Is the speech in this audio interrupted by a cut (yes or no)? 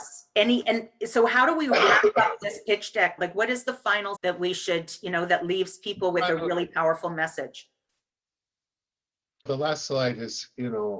yes